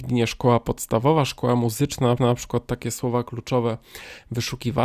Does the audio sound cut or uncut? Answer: cut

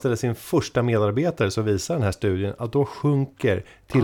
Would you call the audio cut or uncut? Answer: uncut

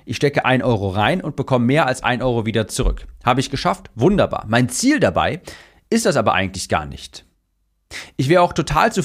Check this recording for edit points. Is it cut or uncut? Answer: uncut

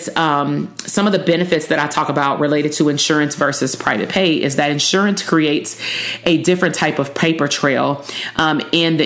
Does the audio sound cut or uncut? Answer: uncut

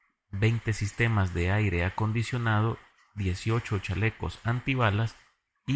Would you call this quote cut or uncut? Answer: uncut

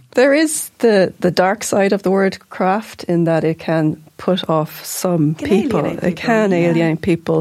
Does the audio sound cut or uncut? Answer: uncut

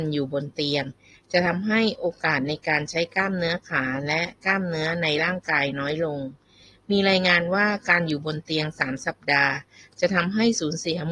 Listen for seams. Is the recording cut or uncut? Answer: uncut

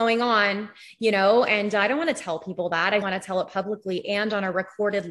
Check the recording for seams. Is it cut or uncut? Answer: cut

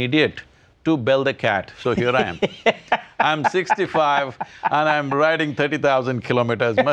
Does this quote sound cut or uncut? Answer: uncut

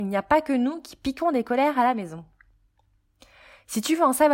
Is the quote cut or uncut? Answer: uncut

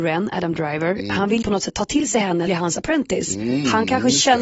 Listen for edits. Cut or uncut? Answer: cut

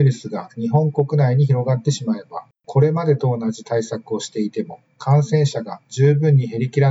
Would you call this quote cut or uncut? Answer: cut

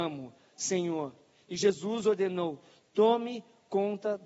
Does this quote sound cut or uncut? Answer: uncut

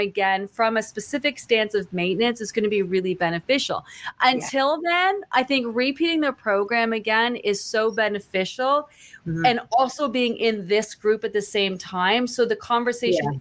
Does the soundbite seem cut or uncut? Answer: uncut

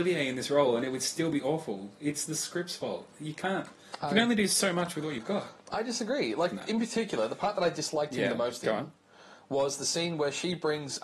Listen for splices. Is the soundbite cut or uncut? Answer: uncut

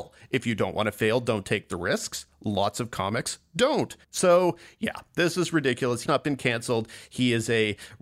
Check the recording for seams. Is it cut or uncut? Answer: cut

